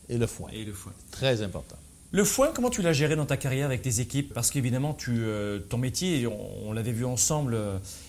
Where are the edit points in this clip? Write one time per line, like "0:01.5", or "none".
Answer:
0:04.3